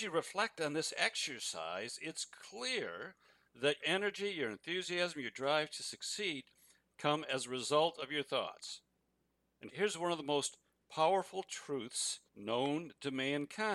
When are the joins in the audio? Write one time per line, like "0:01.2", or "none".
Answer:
0:03.8
0:09.7
0:12.3